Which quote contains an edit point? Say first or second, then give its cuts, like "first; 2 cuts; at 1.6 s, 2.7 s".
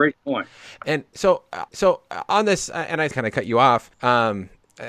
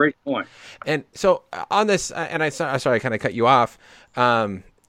first; 3 cuts; at 1.7 s, 3.1 s, 3.9 s